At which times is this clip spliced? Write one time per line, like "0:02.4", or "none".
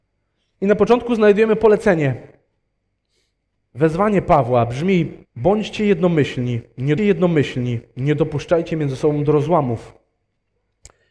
0:05.2
0:07.0

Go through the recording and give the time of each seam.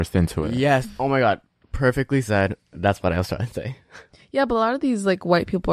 none

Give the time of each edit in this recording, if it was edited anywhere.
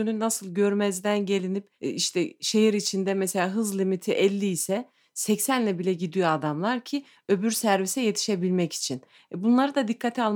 none

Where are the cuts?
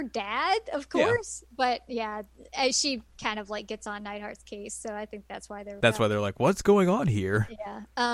0:05.8

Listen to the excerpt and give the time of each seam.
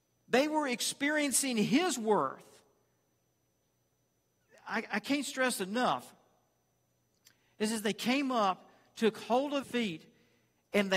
0:05.6
0:09.6

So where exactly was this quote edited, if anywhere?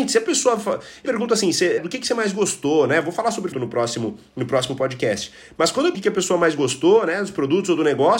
0:01.0
0:01.8
0:03.5
0:05.9

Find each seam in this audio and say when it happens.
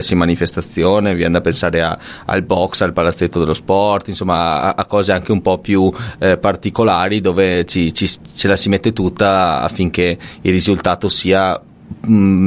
none

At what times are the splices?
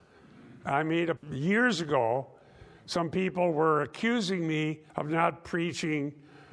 0:01.2
0:04.9

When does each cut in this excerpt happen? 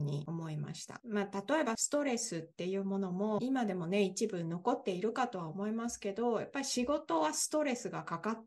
0:03.4

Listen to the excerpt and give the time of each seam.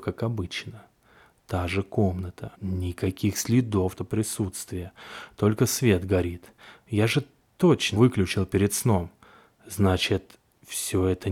0:02.5
0:04.0
0:08.0

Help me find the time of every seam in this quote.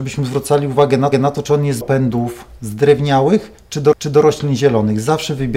0:01.1
0:01.8
0:03.9

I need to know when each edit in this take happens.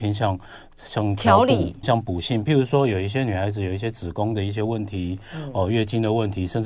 0:01.8

